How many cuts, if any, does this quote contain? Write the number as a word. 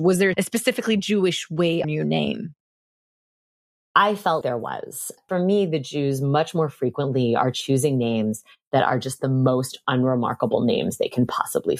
two